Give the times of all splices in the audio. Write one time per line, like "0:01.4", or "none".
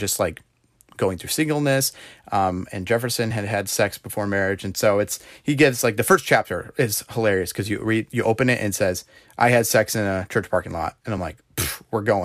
none